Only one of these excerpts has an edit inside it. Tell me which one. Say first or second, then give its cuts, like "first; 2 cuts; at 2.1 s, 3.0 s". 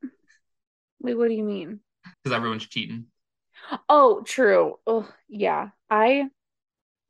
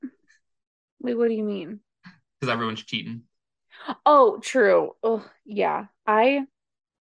first; 1 cut; at 2.1 s